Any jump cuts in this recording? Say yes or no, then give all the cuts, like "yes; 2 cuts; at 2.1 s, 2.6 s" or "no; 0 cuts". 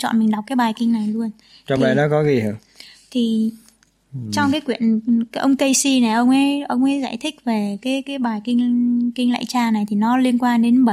no; 0 cuts